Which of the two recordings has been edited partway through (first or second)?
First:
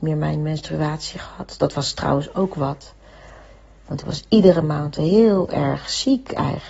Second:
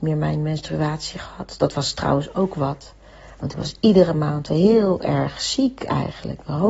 second